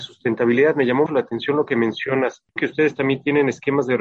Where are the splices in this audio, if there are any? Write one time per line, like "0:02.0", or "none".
0:01.1
0:02.6